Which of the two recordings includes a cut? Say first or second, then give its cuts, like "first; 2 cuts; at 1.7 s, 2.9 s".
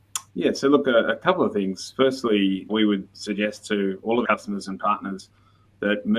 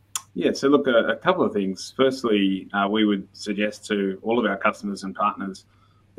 first; 2 cuts; at 2.7 s, 4.2 s